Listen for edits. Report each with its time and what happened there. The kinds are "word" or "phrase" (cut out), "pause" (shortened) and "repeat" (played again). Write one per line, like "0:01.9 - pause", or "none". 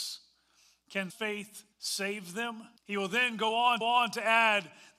0:01.1 - word
0:01.7 - pause
0:02.8 - pause
0:03.8 - repeat